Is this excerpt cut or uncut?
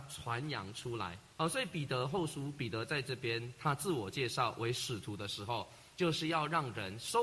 cut